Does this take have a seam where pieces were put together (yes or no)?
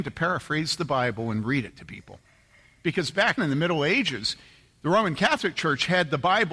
yes